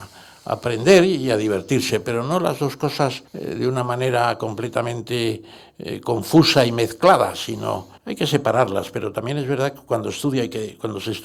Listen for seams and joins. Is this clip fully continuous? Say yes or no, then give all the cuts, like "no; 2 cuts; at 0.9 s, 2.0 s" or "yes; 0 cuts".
no; 2 cuts; at 3.3 s, 8.0 s